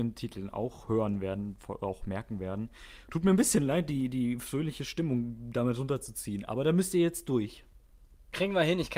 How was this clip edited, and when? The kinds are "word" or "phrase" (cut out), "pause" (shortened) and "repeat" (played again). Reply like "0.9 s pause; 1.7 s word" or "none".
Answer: none